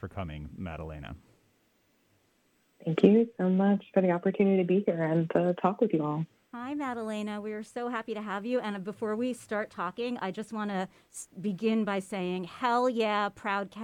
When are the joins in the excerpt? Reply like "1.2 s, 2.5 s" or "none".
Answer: none